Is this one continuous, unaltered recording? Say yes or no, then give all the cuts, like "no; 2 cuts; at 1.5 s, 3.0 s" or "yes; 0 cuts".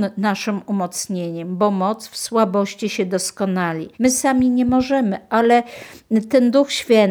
no; 1 cut; at 3.9 s